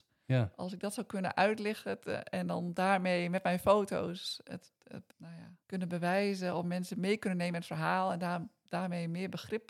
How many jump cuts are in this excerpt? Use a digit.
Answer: 2